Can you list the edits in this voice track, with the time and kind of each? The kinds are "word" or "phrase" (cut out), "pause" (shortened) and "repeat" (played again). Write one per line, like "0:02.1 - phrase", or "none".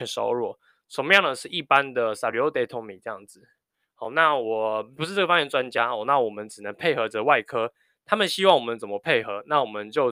none